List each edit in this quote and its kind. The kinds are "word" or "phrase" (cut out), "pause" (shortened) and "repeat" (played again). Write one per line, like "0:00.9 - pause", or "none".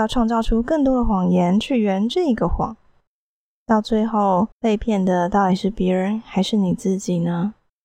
0:04.5 - pause